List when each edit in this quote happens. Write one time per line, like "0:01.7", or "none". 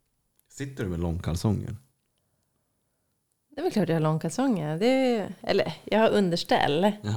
none